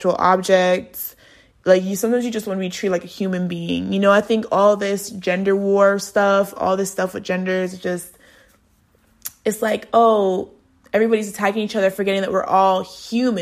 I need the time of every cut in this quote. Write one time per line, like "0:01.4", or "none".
none